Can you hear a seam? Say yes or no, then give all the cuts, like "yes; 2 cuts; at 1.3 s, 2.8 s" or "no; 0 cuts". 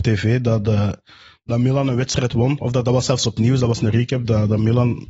no; 0 cuts